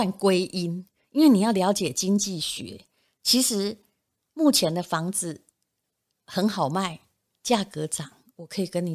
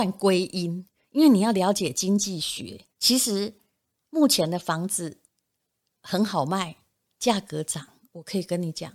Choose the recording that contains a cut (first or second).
second